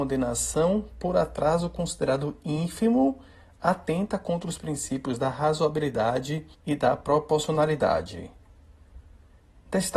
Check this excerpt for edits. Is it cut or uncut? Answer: cut